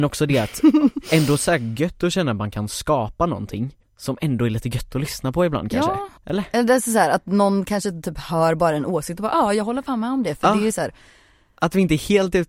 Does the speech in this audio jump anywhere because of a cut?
yes; 2 cuts; at 3.8 s, 6.2 s

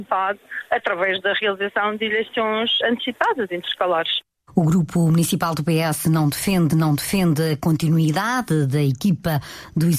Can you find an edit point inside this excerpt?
yes; 3 cuts; at 2.8 s, 4.4 s, 6.7 s

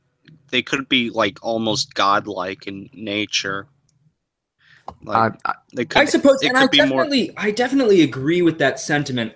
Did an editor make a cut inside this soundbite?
no; 0 cuts

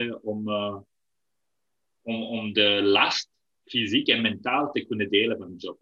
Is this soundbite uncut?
yes; 0 cuts

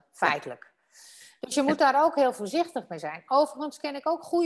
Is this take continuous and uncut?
yes; 0 cuts

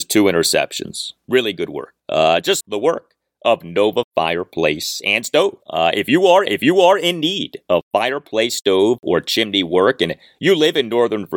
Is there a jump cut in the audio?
yes; 4 cuts; at 2.0 s, 2.6 s, 5.6 s, 6.5 s

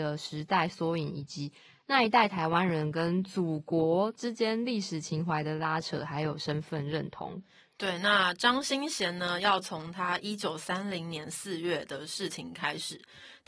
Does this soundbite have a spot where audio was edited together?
no; 0 cuts

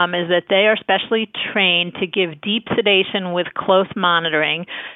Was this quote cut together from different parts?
no; 0 cuts

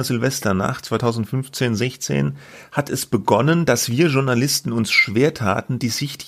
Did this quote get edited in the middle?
no; 0 cuts

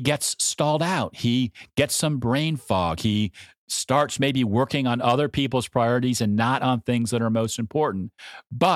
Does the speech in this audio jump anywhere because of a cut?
no; 0 cuts

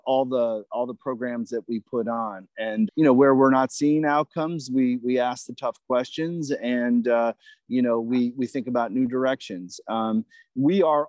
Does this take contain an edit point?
yes; 1 cut; at 2.9 s

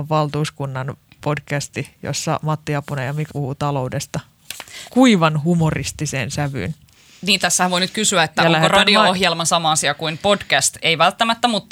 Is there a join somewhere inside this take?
yes; 2 cuts; at 3.3 s, 4.9 s

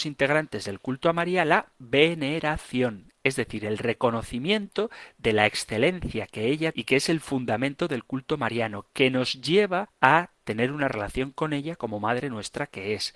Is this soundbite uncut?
no; 1 cut; at 6.7 s

